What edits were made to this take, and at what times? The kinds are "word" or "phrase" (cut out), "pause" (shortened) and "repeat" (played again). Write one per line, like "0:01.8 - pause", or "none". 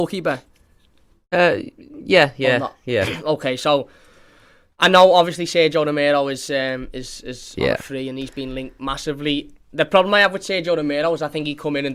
none